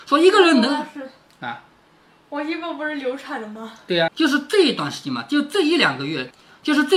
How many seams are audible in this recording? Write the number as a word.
one